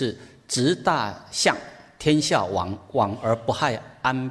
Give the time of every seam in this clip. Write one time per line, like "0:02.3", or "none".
none